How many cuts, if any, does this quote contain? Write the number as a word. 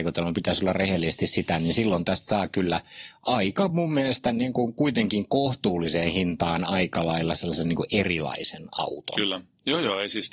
zero